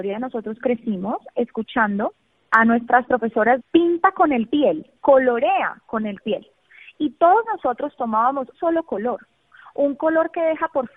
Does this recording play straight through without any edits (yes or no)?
no